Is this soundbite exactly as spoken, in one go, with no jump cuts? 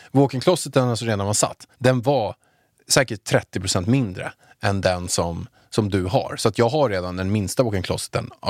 no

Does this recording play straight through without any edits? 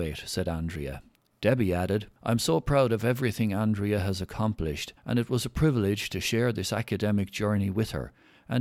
no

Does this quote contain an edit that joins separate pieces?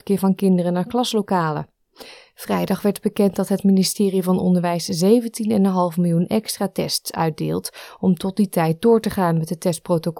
no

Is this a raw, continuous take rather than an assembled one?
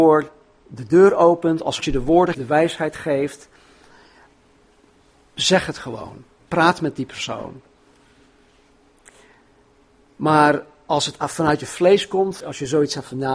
no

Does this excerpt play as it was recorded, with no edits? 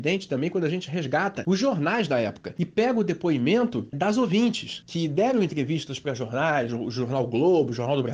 no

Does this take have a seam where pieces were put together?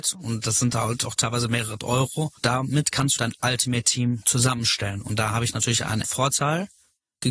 yes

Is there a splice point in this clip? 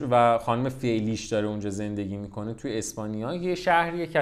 no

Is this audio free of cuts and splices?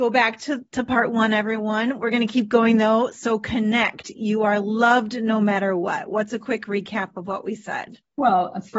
yes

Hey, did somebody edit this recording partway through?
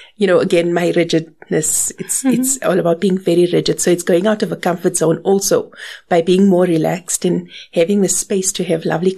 no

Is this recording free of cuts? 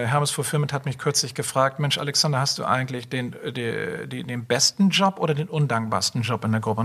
yes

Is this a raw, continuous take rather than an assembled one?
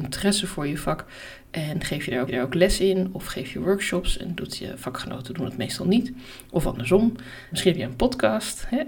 no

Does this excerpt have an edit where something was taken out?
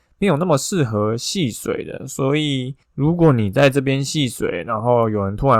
yes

